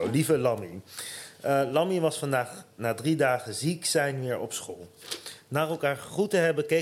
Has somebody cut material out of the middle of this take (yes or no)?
no